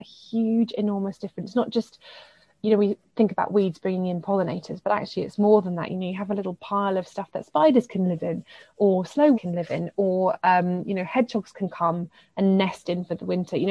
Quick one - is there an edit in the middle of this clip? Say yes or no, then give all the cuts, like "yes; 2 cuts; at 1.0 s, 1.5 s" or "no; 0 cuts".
yes; 1 cut; at 9.3 s